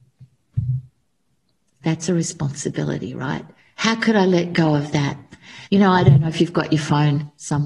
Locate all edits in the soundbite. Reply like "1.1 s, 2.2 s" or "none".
3.6 s, 5.6 s